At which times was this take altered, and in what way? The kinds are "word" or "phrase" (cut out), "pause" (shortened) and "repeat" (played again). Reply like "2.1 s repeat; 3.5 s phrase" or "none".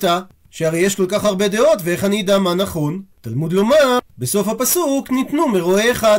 none